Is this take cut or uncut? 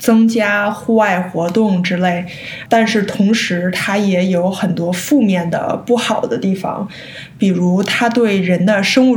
cut